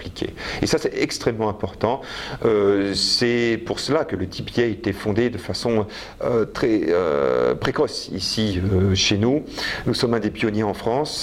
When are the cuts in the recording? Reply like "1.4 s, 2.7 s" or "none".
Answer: none